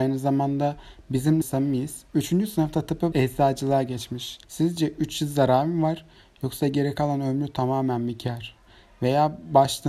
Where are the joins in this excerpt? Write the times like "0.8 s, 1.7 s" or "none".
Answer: 1.4 s, 2.1 s, 3.1 s, 4.4 s